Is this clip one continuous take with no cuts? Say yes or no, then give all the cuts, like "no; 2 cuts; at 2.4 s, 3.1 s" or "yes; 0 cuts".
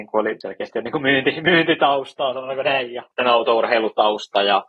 yes; 0 cuts